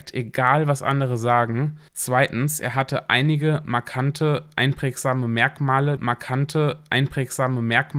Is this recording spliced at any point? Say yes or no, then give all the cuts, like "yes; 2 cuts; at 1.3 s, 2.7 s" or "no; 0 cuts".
yes; 2 cuts; at 1.9 s, 6.0 s